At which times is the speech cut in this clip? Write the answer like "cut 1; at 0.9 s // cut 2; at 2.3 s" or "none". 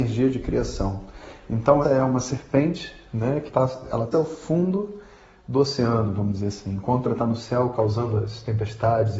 cut 1; at 1.8 s // cut 2; at 3.5 s // cut 3; at 4.1 s // cut 4; at 7.0 s